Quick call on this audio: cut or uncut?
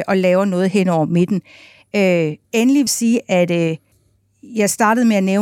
cut